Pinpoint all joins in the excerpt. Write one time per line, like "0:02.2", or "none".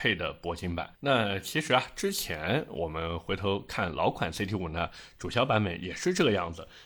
0:00.9